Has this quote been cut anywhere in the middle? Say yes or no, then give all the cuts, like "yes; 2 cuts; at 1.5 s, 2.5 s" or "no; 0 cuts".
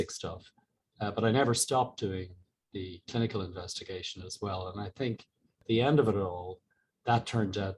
no; 0 cuts